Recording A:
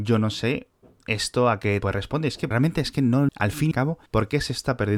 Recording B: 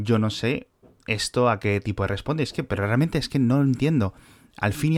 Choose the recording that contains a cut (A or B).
A